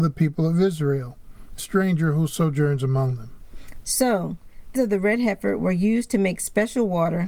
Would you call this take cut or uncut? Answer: cut